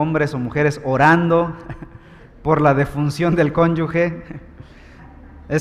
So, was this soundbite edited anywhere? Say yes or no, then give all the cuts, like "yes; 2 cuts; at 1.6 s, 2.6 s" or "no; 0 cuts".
no; 0 cuts